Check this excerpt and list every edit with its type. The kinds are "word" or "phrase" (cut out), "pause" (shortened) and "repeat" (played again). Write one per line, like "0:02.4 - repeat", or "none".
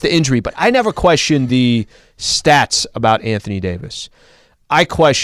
none